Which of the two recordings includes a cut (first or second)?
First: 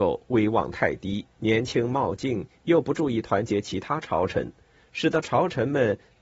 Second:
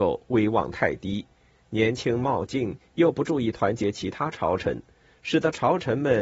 first